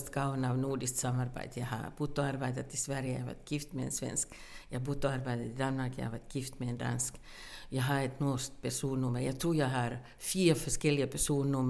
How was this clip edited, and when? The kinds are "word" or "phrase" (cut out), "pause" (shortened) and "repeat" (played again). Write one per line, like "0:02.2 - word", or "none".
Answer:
none